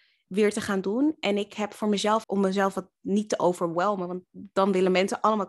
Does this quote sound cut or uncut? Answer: cut